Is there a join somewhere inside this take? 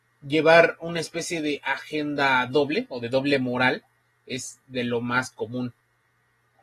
no; 0 cuts

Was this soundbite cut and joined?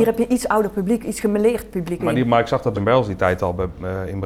yes; 2 cuts; at 2.0 s, 2.7 s

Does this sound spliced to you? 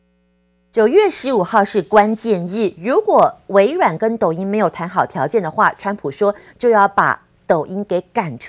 no; 0 cuts

